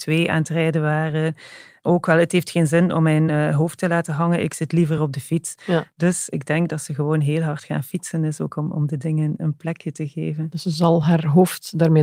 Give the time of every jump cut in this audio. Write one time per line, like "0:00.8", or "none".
none